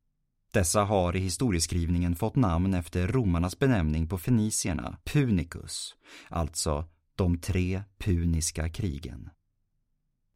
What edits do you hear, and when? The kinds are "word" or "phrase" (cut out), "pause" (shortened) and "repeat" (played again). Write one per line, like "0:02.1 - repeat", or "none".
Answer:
0:05.0 - pause